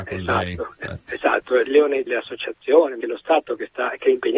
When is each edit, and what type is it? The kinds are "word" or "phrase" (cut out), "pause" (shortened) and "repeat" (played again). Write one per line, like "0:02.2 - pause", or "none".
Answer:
0:01.6 - word
0:02.1 - word
0:03.0 - word